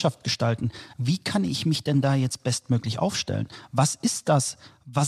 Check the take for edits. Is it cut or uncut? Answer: uncut